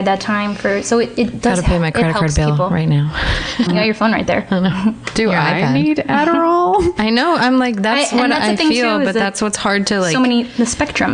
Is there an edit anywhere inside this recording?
yes; 1 cut; at 3.7 s

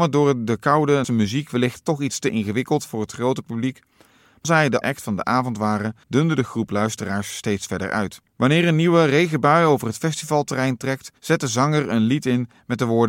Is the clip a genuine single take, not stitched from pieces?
no; 6 cuts; at 1.0 s, 4.4 s, 4.8 s, 6.0 s, 8.3 s, 11.2 s

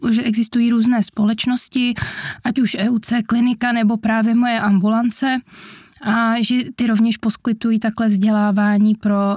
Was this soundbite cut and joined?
no; 0 cuts

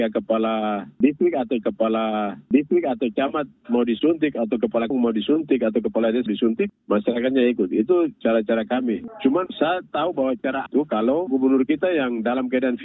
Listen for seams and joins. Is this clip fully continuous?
no; 6 cuts; at 1.6 s, 4.9 s, 6.3 s, 9.5 s, 10.7 s, 11.3 s

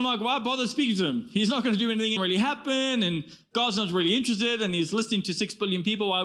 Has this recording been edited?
yes; 1 cut; at 2.2 s

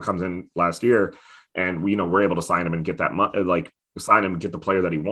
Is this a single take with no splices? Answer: yes; 0 cuts

